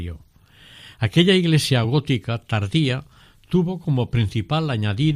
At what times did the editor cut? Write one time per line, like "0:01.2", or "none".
none